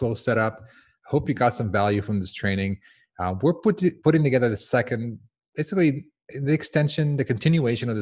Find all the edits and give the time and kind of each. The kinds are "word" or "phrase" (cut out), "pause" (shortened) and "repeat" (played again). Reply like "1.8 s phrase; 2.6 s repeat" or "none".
none

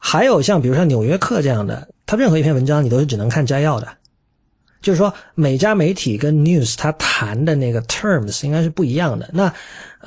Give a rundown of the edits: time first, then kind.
none

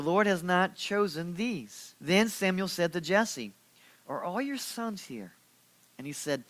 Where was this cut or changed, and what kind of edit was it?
2.0 s pause

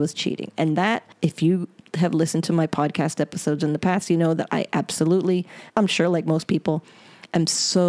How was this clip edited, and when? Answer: 5.7 s pause

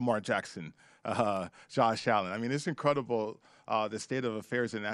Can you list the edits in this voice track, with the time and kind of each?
none

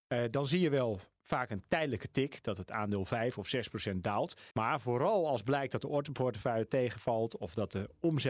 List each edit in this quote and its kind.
4.5 s pause

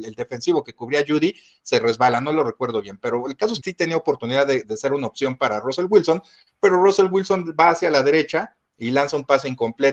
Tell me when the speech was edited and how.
3.6 s word; 4.6 s word

